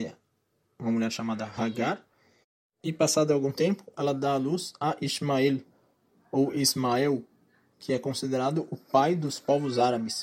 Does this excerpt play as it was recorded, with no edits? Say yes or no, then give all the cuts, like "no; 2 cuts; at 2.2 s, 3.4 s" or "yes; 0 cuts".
yes; 0 cuts